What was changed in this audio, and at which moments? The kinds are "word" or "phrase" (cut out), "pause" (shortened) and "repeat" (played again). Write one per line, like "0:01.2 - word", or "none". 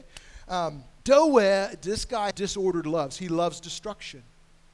0:01.0 - pause
0:02.3 - word